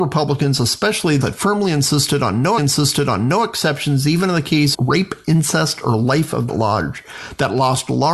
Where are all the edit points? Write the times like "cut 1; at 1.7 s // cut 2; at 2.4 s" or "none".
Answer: cut 1; at 1.2 s // cut 2; at 2.6 s // cut 3; at 4.7 s // cut 4; at 6.5 s